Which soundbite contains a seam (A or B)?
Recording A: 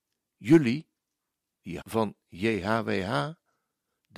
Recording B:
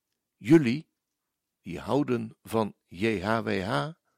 A